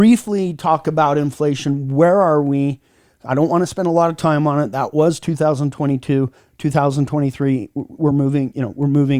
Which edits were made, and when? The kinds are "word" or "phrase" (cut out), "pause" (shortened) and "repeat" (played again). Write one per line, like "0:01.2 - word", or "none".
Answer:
none

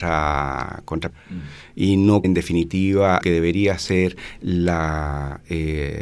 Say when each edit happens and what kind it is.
0:01.1 - word
0:02.2 - word
0:03.2 - word

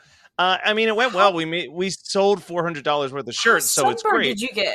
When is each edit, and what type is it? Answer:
none

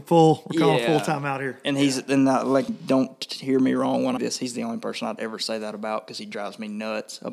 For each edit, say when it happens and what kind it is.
0:02.7 - word
0:04.2 - phrase

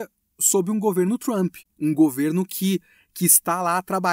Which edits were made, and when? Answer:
none

